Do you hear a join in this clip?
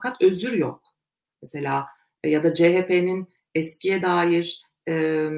no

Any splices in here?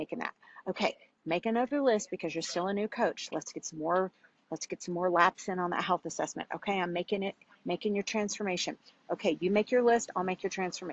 no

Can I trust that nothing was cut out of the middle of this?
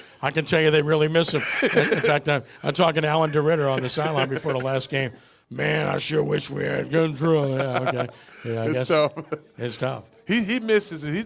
yes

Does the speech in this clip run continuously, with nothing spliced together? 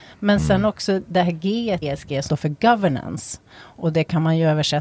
no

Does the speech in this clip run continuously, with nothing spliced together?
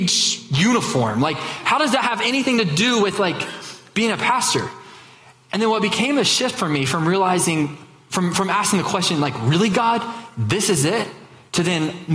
yes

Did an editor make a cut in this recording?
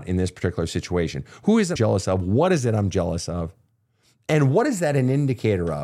yes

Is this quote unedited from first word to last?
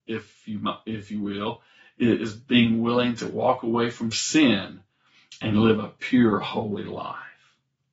yes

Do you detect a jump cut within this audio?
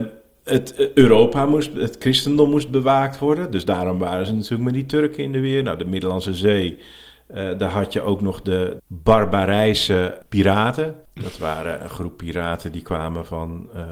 no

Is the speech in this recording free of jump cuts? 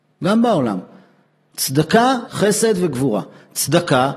no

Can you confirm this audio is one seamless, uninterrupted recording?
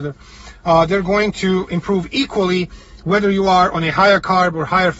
yes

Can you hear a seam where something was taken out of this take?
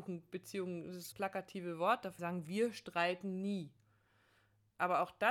yes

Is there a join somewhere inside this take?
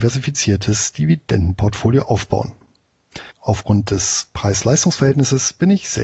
yes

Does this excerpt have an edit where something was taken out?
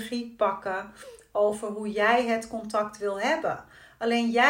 no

